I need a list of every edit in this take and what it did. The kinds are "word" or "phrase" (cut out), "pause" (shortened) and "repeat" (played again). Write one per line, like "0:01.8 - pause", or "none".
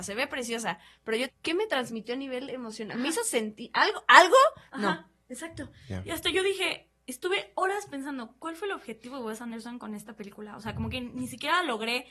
0:01.3 - phrase